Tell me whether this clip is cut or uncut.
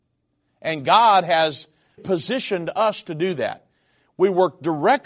cut